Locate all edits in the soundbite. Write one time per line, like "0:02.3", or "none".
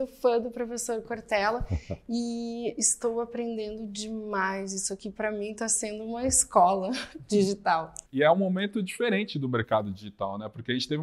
0:08.1